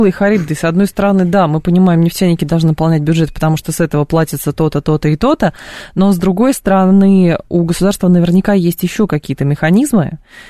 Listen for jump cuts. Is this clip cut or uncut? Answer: uncut